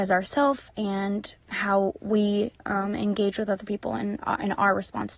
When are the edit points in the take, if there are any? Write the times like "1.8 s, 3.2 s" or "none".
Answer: 1.4 s, 2.6 s